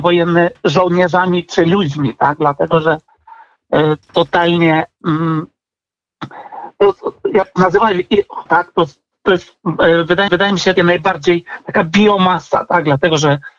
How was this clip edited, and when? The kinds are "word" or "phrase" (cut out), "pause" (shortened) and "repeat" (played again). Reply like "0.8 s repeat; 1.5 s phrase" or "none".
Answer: 4.0 s word; 8.5 s word; 10.3 s repeat; 10.8 s word